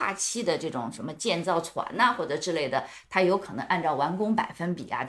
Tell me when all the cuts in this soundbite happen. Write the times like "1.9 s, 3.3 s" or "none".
none